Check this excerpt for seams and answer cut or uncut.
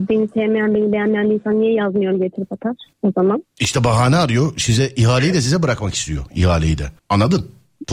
cut